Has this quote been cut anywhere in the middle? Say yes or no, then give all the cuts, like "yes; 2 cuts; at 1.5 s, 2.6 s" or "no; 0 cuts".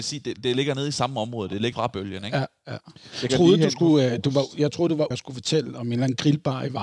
yes; 3 cuts; at 1.7 s, 3.3 s, 5.1 s